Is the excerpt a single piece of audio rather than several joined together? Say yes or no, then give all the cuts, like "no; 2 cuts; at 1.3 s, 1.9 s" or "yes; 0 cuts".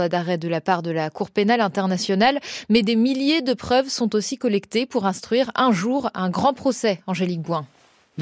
yes; 0 cuts